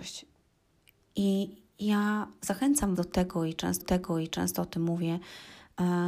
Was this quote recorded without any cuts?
no; 2 cuts; at 2.9 s, 3.8 s

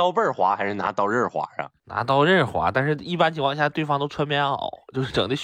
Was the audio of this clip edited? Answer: no; 0 cuts

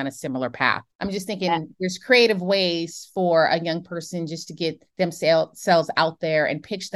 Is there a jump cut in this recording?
yes; 2 cuts; at 0.9 s, 4.9 s

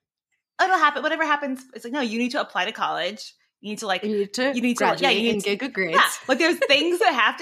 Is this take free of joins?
yes; 0 cuts

